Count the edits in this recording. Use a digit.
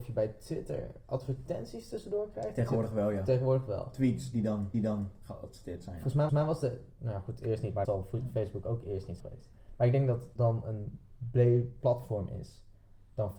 6